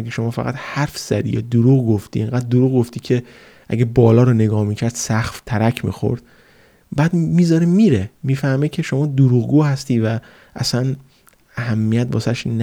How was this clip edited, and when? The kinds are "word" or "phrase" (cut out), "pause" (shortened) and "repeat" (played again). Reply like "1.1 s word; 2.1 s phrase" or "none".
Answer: none